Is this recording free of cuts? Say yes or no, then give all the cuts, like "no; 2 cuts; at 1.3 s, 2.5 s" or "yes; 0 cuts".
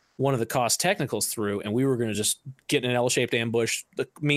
yes; 0 cuts